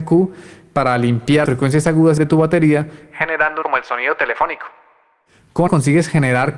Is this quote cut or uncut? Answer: cut